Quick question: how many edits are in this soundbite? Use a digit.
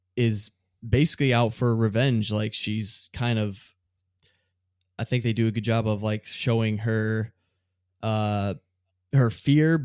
0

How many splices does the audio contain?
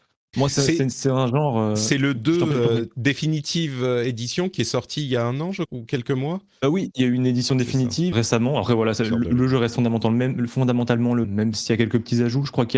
3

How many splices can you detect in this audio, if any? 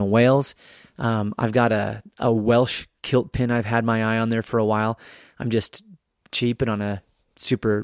0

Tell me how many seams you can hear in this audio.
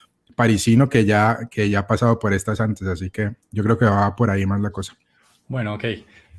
0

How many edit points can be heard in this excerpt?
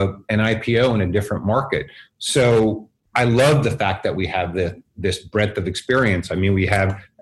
1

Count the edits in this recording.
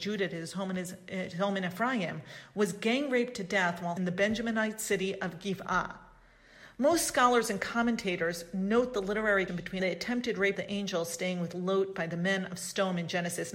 4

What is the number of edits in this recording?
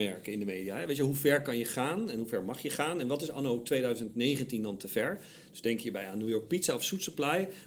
0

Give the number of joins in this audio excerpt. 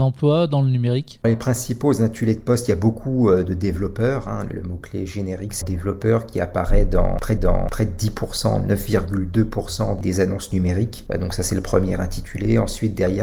3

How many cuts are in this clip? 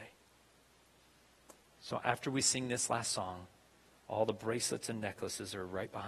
0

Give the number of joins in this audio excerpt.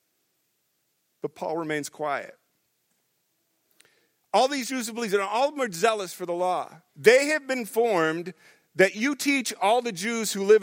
1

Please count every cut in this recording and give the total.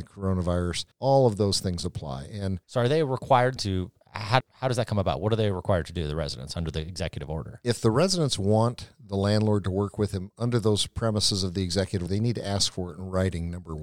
5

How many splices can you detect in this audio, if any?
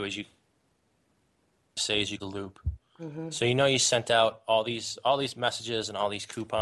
1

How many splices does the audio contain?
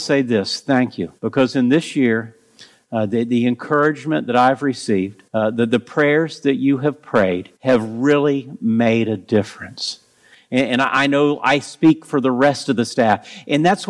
3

